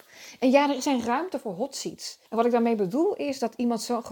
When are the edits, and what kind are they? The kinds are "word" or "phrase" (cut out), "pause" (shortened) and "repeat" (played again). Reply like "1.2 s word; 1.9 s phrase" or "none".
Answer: 2.3 s pause